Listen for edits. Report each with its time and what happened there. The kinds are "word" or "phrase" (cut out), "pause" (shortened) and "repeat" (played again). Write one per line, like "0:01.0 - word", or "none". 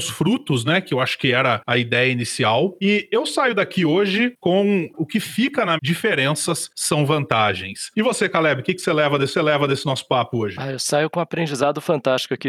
0:05.8 - phrase
0:09.3 - repeat